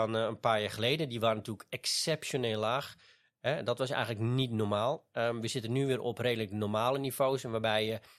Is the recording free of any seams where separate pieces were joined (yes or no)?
yes